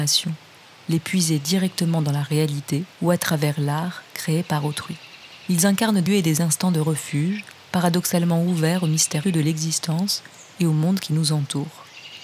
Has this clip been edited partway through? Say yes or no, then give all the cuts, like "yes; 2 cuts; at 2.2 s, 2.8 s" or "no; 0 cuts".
yes; 3 cuts; at 2.9 s, 6.1 s, 9.2 s